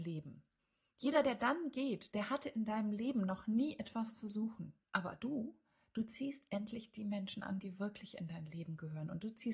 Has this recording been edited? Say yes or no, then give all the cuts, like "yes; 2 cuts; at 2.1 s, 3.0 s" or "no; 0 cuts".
yes; 1 cut; at 4.8 s